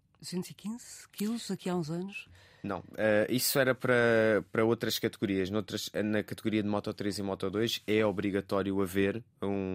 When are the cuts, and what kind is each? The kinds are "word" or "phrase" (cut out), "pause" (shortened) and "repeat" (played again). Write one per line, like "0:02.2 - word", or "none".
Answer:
none